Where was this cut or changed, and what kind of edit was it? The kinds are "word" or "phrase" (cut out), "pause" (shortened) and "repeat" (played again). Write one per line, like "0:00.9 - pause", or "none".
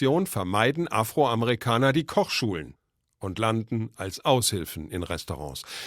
none